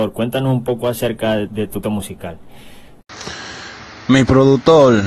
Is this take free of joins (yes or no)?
no